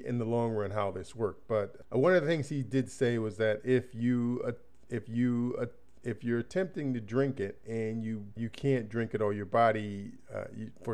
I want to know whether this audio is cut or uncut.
cut